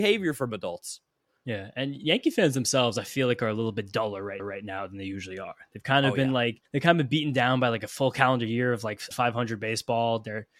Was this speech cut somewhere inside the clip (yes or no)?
yes